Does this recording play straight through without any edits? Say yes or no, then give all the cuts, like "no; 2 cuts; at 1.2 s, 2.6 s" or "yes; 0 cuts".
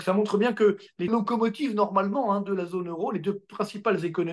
no; 1 cut; at 1.1 s